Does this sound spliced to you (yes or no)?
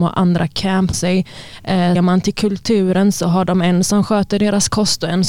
yes